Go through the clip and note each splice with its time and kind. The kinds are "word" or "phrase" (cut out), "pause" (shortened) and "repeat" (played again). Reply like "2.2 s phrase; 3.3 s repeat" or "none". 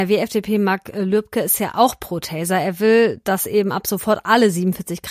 none